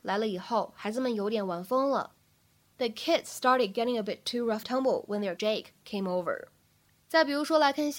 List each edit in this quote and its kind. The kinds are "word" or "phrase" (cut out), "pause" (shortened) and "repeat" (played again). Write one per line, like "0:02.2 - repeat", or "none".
0:04.6 - word
0:05.4 - word